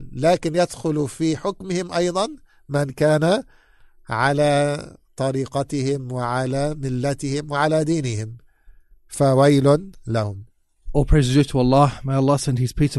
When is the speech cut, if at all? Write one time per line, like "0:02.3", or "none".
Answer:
none